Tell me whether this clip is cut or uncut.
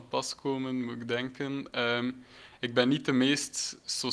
uncut